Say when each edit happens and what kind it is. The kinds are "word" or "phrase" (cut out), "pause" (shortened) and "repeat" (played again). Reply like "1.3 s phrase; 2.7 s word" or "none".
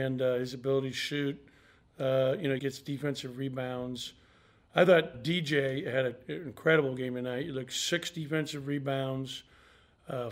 2.6 s word; 5.1 s word